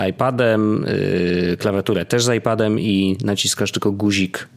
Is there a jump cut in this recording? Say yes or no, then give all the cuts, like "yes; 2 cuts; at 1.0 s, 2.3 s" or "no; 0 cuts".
no; 0 cuts